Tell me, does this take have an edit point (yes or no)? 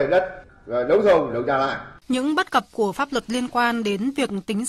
yes